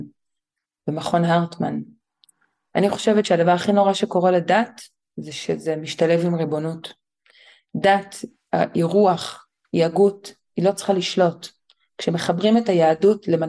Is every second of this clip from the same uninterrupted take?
yes; 0 cuts

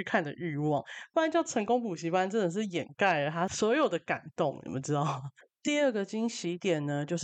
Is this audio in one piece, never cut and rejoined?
yes; 0 cuts

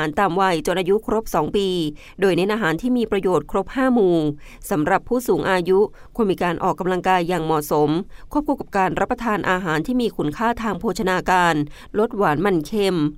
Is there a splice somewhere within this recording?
no; 0 cuts

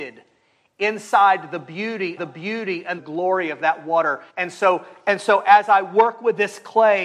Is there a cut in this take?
yes; 3 cuts; at 2.2 s, 3.0 s, 4.3 s

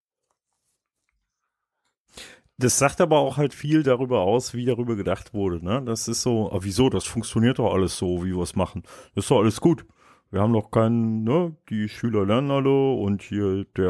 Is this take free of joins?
yes; 0 cuts

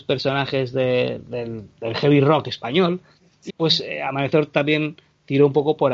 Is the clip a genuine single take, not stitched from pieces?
no; 1 cut; at 3.5 s

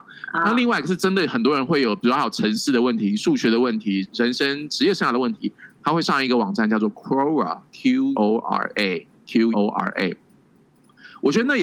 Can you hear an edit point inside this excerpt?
yes; 2 cuts; at 8.1 s, 9.5 s

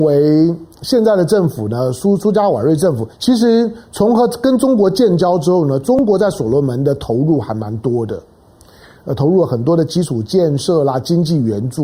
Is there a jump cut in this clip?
yes; 1 cut; at 3.1 s

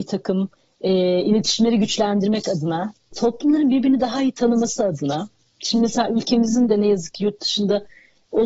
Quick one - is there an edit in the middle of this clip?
no; 0 cuts

